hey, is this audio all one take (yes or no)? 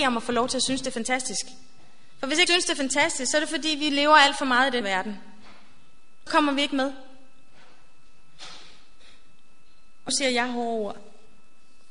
no